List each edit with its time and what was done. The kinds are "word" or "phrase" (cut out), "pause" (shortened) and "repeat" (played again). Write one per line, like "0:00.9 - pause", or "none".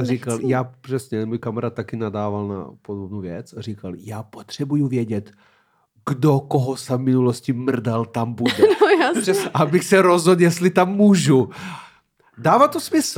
none